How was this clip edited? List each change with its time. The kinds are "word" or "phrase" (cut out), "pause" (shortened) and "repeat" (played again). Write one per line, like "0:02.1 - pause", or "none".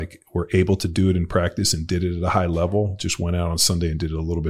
none